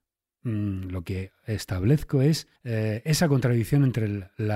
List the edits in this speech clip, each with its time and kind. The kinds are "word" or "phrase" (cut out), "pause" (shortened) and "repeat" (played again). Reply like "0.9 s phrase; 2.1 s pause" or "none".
2.6 s pause